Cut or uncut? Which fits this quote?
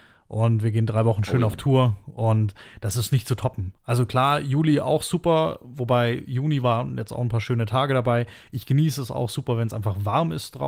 uncut